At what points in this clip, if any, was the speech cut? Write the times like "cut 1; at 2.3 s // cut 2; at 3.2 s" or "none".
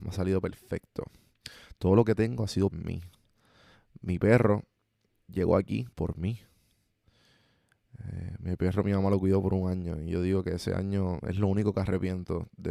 cut 1; at 2.7 s // cut 2; at 5.2 s // cut 3; at 5.9 s